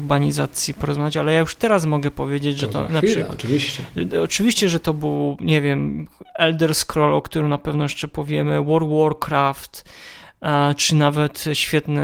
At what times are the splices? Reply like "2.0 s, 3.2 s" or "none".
none